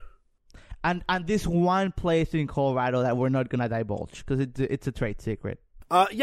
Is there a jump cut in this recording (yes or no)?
no